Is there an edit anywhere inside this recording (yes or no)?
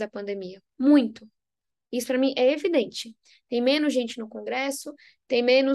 no